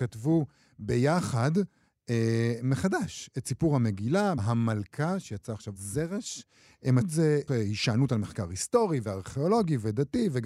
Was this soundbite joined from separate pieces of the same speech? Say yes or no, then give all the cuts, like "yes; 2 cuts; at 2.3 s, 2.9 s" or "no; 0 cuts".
yes; 4 cuts; at 4.4 s, 5.8 s, 7.0 s, 7.5 s